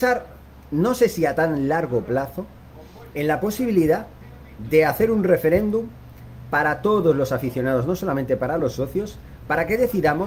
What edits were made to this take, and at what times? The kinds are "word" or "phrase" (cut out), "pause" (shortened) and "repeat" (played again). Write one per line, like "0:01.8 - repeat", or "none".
none